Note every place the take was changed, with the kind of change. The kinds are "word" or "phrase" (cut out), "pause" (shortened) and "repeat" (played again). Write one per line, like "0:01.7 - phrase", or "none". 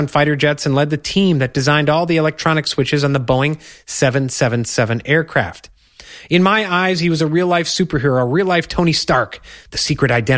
none